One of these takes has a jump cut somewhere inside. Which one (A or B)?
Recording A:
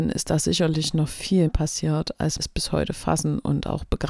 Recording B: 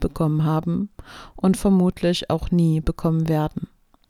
A